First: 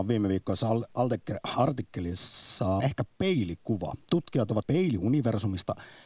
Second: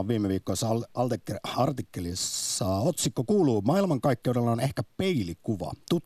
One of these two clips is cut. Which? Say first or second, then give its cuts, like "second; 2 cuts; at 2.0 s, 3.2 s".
first; 2 cuts; at 2.8 s, 4.6 s